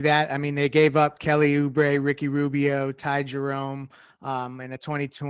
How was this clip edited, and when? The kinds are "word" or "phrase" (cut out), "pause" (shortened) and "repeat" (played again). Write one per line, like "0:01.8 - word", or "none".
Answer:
none